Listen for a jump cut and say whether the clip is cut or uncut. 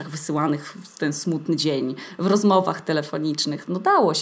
uncut